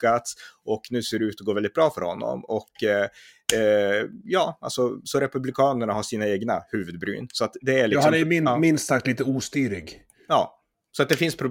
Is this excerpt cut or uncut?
uncut